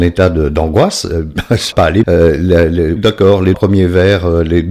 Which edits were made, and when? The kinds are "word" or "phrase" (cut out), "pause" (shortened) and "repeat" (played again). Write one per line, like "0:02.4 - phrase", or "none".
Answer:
0:01.7 - word
0:02.0 - word
0:03.0 - word
0:03.5 - phrase